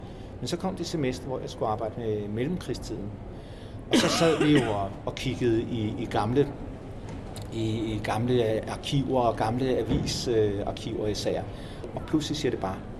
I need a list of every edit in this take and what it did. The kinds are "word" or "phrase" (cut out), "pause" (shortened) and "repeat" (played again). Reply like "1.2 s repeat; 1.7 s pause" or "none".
none